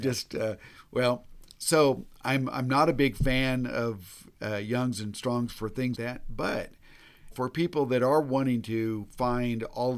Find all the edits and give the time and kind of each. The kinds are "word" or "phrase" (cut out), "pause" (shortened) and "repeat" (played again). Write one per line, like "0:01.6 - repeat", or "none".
0:05.9 - word
0:07.3 - word